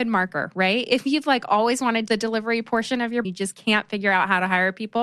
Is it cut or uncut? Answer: cut